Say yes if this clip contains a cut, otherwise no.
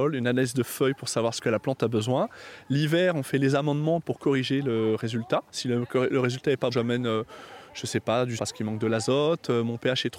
yes